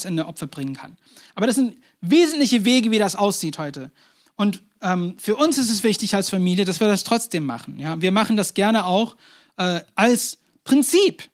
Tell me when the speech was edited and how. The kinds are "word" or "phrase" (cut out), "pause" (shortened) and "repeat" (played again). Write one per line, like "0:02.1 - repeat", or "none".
none